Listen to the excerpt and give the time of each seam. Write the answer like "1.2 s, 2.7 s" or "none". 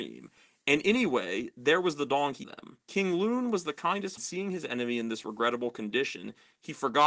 2.4 s, 2.8 s, 4.2 s